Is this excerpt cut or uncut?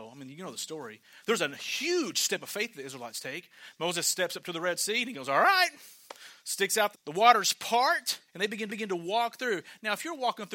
cut